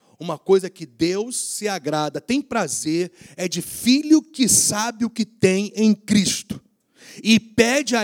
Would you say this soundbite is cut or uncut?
uncut